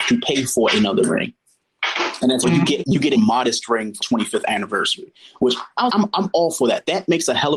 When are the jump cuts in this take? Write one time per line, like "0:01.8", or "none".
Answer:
0:02.4
0:02.8
0:03.1
0:04.0
0:05.9

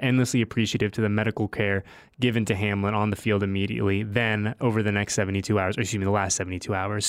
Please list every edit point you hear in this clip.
none

